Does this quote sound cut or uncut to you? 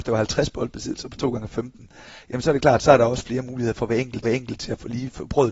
cut